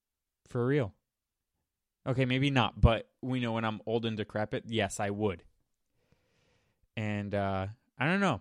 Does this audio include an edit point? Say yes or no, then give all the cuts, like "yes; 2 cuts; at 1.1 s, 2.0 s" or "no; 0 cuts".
no; 0 cuts